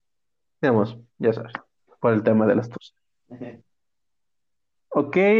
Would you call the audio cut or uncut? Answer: uncut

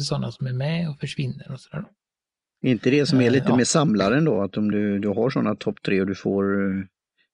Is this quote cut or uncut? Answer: uncut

